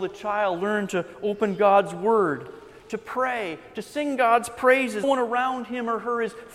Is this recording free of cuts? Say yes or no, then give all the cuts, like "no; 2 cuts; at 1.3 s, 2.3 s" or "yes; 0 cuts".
no; 1 cut; at 5.0 s